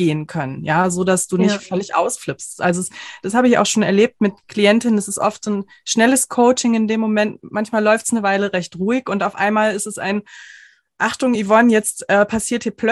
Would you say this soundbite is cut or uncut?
uncut